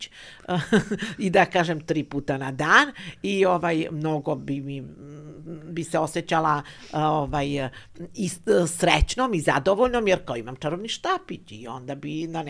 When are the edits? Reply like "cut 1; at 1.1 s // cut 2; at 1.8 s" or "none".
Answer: none